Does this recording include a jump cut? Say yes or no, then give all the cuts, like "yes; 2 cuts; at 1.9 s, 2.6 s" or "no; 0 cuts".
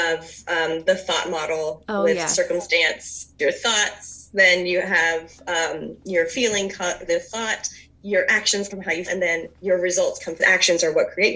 yes; 6 cuts; at 3.4 s, 7.1 s, 8.7 s, 9.1 s, 9.5 s, 10.4 s